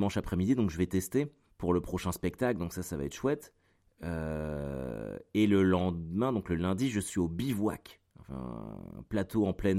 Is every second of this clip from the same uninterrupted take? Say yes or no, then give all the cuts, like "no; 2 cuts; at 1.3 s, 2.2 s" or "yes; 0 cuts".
no; 1 cut; at 1.5 s